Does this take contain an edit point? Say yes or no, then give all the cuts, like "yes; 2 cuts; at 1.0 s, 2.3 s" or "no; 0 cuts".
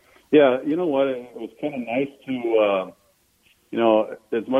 no; 0 cuts